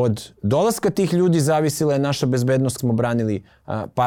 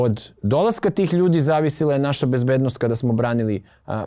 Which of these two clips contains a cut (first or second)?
first